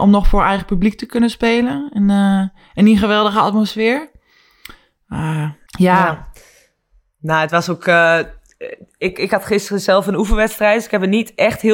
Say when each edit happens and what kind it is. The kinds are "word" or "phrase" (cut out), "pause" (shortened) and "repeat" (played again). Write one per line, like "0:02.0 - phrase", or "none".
0:05.7 - pause